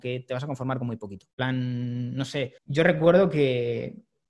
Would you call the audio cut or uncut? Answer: cut